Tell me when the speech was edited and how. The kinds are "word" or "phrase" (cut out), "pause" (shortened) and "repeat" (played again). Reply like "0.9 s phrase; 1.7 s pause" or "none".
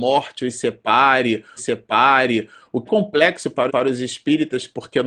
1.6 s repeat; 2.9 s word; 3.7 s repeat